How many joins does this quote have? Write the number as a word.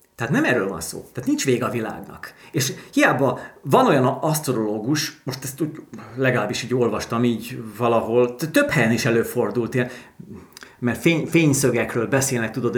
zero